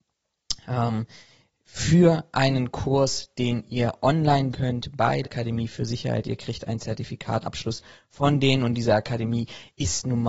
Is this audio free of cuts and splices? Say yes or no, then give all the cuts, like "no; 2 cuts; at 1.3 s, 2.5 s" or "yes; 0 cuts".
no; 3 cuts; at 4.5 s, 5.2 s, 7.4 s